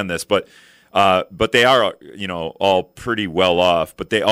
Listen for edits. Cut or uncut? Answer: uncut